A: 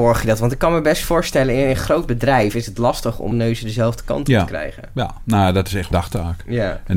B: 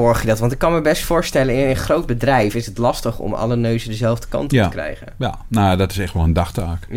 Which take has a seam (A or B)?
A